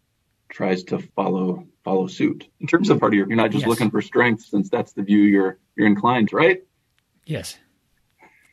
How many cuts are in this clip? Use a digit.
6